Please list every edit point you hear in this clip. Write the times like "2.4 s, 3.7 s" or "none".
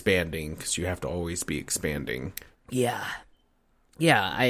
2.5 s